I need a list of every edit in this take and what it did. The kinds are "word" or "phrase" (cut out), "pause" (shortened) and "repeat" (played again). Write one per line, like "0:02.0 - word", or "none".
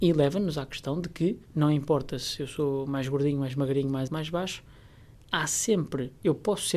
0:01.5 - pause
0:04.1 - word